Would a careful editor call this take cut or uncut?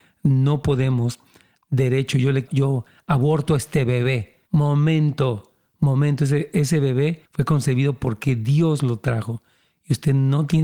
cut